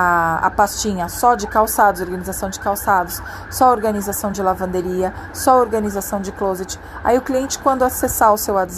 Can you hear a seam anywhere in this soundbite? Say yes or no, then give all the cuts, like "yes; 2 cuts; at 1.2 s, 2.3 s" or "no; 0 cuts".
no; 0 cuts